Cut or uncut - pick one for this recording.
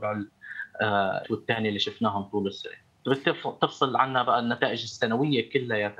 cut